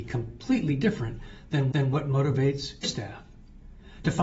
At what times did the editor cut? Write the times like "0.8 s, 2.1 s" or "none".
1.7 s, 2.8 s